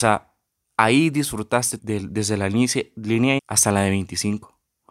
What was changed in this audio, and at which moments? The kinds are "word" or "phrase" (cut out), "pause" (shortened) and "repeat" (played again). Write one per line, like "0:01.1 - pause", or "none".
0:01.8 - word
0:03.4 - word